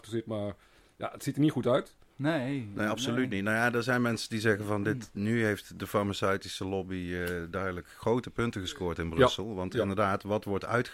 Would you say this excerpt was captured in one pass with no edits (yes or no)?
yes